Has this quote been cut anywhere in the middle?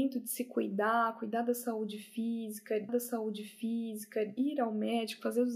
yes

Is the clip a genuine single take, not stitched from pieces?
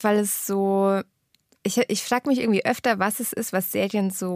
yes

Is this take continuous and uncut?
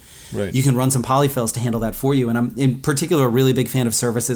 yes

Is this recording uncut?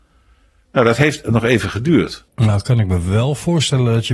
no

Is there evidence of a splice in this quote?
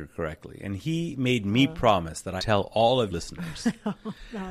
yes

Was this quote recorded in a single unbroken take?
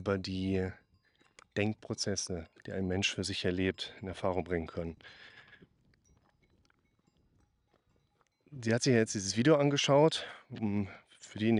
yes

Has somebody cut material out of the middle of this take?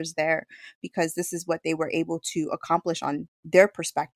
no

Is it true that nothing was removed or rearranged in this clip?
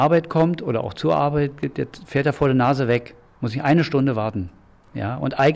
yes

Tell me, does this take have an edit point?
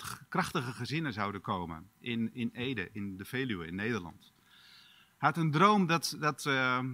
no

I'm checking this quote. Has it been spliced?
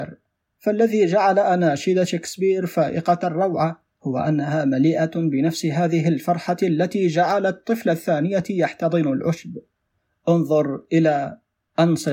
no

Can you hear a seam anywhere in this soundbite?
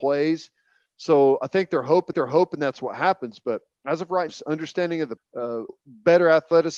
yes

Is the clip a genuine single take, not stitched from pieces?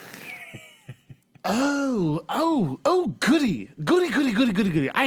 yes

